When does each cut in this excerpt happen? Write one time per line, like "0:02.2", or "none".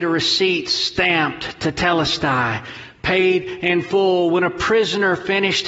none